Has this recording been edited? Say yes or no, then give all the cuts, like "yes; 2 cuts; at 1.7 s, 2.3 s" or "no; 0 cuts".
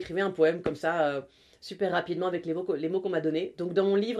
no; 0 cuts